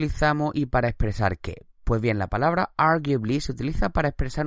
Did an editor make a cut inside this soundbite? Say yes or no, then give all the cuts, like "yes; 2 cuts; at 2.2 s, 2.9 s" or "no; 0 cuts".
no; 0 cuts